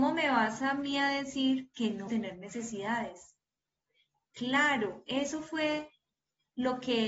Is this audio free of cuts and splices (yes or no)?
no